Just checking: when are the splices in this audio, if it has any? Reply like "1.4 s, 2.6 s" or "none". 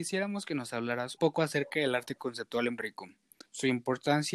1.2 s, 2.8 s, 3.4 s